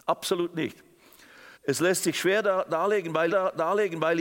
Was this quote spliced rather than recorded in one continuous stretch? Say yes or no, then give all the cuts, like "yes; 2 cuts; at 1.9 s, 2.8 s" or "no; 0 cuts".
yes; 2 cuts; at 1.5 s, 3.3 s